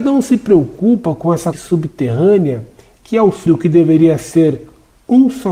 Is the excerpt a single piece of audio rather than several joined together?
no; 2 cuts; at 1.5 s, 3.5 s

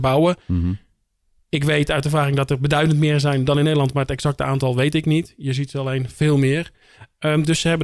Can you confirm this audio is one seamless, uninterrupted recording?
yes; 0 cuts

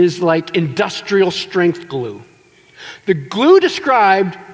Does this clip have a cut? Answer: no; 0 cuts

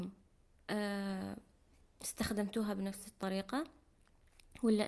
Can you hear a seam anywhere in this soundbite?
no; 0 cuts

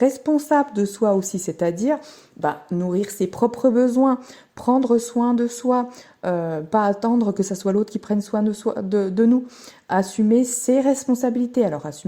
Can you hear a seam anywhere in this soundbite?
no; 0 cuts

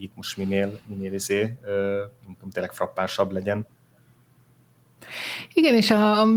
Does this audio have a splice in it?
no; 0 cuts

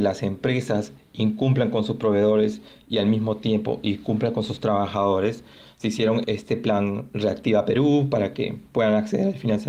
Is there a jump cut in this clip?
yes; 1 cut; at 6.2 s

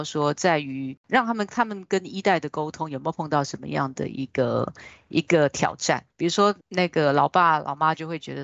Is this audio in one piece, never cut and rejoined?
no; 3 cuts; at 1.0 s, 6.1 s, 6.6 s

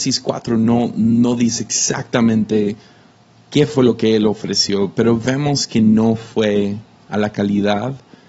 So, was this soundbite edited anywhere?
no; 0 cuts

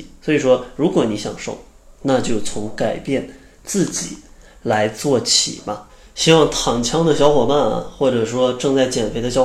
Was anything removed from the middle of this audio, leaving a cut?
no; 0 cuts

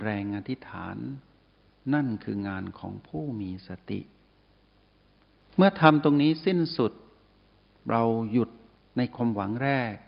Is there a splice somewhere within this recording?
no; 0 cuts

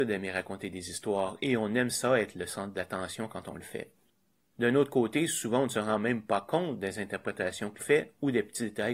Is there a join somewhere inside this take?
yes; 1 cut; at 7.8 s

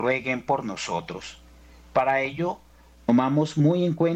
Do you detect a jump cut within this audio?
no; 0 cuts

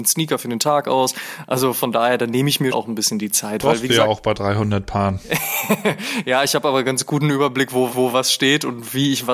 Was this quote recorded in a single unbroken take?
no; 2 cuts; at 2.7 s, 7.9 s

